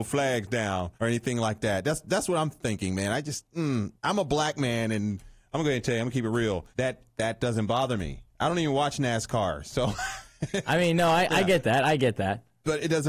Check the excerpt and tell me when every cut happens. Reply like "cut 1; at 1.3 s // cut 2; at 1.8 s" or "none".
cut 1; at 1.0 s // cut 2; at 4.0 s // cut 3; at 6.7 s